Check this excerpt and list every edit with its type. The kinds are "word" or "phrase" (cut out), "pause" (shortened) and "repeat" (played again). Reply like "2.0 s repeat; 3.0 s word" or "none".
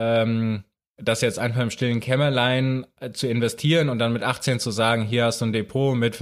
none